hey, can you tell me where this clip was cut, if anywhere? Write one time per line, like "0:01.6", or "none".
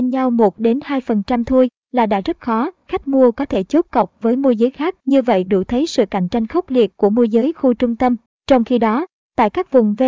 0:05.0